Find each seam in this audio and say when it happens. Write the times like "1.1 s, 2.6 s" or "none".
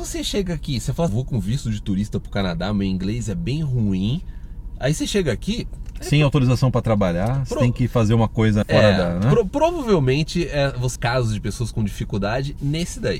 1.1 s, 8.6 s, 11.0 s